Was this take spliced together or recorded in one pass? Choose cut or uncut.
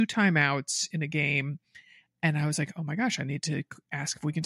uncut